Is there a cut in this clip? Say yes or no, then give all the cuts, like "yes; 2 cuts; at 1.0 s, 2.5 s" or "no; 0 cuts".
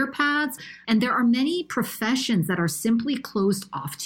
no; 0 cuts